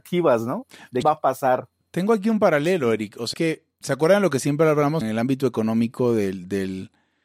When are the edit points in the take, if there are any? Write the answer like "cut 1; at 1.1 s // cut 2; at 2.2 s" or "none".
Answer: cut 1; at 1.0 s // cut 2; at 3.3 s // cut 3; at 3.8 s // cut 4; at 5.0 s